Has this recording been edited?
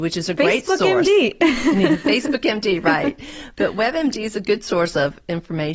no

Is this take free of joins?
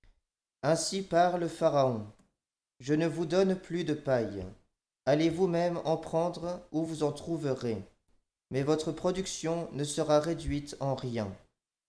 yes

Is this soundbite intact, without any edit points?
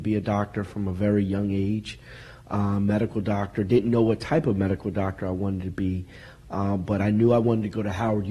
yes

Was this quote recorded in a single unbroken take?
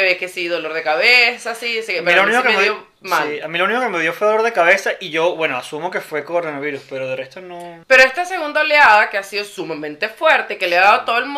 no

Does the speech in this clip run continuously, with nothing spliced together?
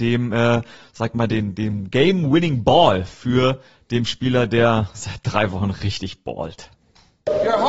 yes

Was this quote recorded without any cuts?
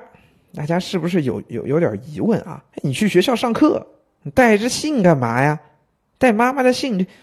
no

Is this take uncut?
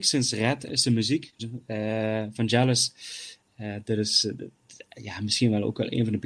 no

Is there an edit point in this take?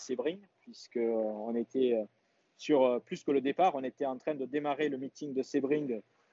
no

